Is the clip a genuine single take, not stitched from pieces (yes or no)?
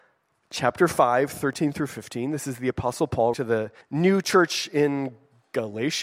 no